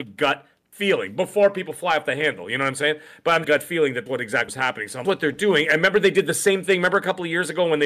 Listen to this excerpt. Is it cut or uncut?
cut